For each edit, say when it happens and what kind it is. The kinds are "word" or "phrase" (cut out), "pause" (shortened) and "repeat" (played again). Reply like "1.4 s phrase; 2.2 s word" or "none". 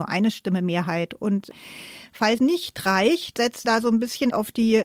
2.4 s word; 3.6 s word